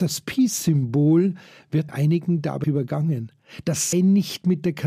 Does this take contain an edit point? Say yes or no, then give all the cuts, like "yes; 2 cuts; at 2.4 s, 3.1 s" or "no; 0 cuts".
yes; 3 cuts; at 1.9 s, 2.6 s, 3.9 s